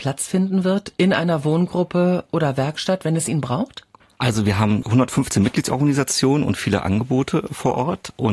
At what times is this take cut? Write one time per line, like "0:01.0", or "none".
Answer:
0:04.0